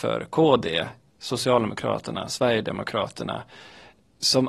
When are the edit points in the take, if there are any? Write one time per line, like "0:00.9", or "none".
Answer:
0:01.1